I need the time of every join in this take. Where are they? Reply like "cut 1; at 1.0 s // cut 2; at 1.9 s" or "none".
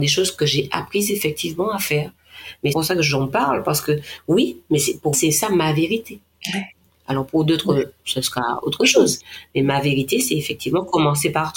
cut 1; at 2.7 s // cut 2; at 5.1 s